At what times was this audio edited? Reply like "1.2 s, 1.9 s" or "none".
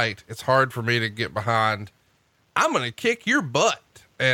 none